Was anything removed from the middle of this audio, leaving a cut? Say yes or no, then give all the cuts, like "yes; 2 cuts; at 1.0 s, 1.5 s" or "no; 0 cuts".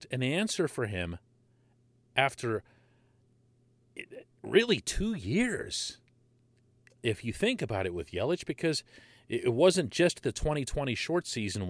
no; 0 cuts